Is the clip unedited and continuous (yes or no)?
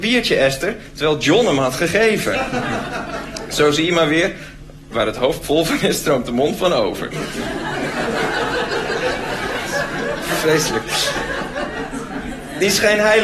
yes